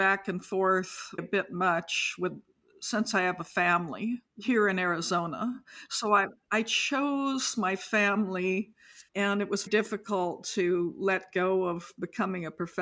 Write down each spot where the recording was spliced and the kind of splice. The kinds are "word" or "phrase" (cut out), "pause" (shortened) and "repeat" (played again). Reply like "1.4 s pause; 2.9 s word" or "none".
1.2 s phrase; 4.3 s pause; 9.1 s pause; 9.7 s word